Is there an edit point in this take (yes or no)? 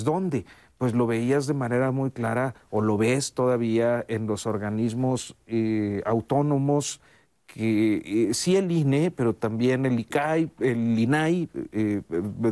no